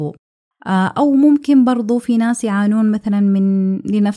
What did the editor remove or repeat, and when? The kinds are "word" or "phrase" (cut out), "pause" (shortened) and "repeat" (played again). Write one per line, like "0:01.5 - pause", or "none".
none